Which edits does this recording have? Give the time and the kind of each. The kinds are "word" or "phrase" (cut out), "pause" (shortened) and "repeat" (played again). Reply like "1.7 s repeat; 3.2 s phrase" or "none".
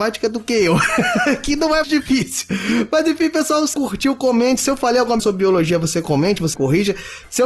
1.8 s word; 3.7 s word; 5.2 s word; 6.5 s word